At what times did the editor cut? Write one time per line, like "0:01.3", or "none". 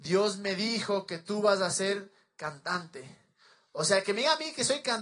none